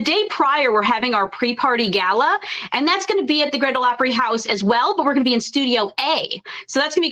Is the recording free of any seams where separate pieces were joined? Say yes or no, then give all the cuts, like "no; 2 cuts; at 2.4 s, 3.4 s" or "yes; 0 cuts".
yes; 0 cuts